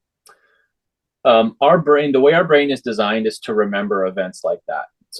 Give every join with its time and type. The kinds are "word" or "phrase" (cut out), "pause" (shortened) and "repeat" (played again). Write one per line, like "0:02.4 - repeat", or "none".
none